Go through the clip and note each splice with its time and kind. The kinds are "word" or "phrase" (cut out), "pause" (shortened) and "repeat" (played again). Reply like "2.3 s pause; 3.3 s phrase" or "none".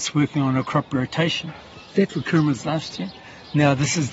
2.1 s phrase

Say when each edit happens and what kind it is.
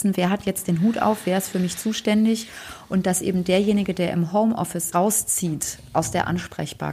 4.9 s phrase

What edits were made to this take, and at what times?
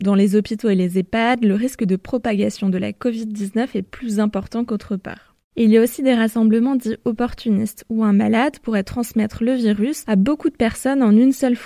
none

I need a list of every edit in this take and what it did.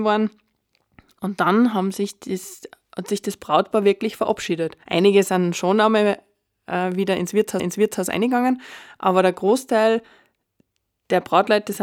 4.8 s pause; 7.6 s repeat

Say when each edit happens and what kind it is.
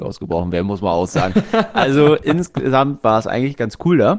none

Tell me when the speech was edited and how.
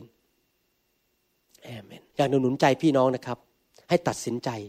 2.1 s pause

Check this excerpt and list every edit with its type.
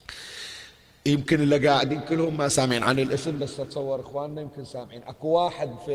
none

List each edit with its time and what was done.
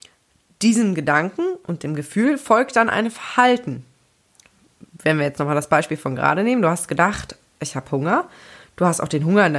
none

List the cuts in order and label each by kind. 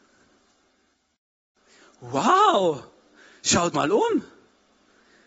3.7 s word

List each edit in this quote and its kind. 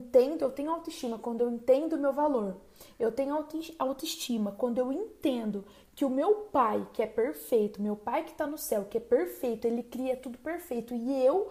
none

